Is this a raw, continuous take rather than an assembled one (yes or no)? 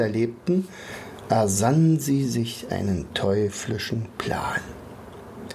yes